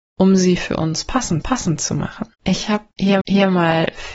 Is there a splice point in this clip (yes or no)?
yes